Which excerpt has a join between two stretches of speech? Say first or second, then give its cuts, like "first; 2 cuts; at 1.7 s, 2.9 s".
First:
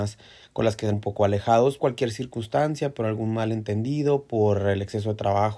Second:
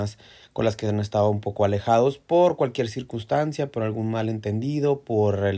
first; 2 cuts; at 0.9 s, 1.8 s